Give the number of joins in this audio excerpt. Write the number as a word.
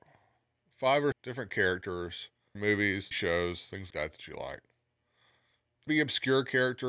five